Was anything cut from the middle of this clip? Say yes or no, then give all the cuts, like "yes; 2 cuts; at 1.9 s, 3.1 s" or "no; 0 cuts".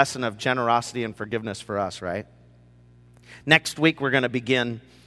no; 0 cuts